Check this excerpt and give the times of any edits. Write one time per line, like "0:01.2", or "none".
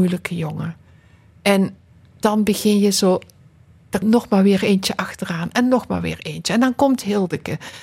0:04.0